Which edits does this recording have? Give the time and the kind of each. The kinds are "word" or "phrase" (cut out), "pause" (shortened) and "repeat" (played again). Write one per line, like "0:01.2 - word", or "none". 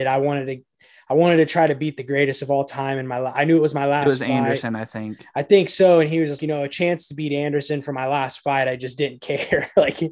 0:06.4 - word